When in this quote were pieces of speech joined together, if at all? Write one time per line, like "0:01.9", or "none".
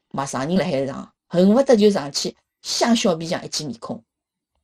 0:01.2